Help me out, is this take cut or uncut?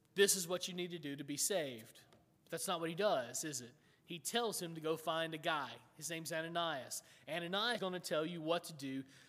cut